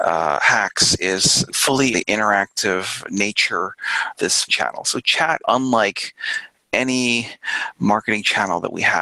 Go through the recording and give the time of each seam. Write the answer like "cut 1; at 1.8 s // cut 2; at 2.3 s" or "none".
cut 1; at 1.5 s // cut 2; at 1.9 s // cut 3; at 4.1 s // cut 4; at 4.5 s // cut 5; at 5.4 s